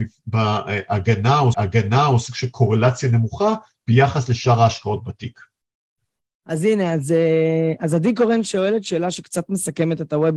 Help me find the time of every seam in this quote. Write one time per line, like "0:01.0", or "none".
0:01.5